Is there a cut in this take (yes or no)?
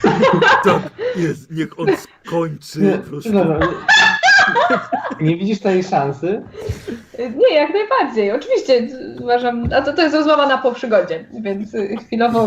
no